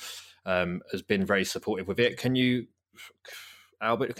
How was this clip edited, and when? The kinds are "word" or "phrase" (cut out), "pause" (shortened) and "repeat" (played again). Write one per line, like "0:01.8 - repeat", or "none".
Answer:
none

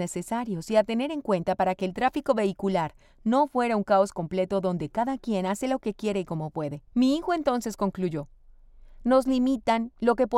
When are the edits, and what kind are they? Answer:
0:06.9 - pause

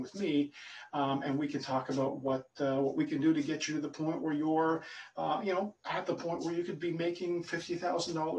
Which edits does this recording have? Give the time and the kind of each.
0:05.8 - pause

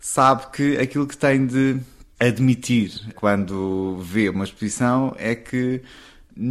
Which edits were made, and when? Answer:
none

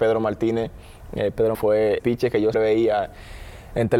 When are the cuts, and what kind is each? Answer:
0:01.5 - word
0:02.0 - word
0:02.5 - word

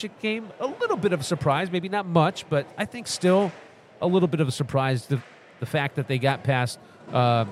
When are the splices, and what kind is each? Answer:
none

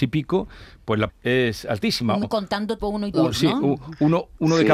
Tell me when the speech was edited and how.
0:01.1 - word
0:02.2 - word
0:02.8 - word
0:03.1 - word

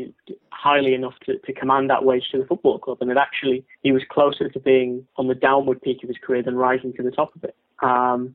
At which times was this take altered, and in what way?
0:03.7 - pause
0:05.1 - pause

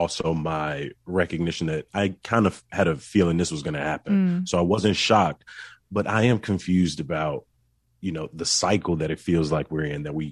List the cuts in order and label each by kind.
none

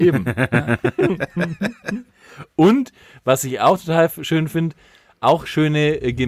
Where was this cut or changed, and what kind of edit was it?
none

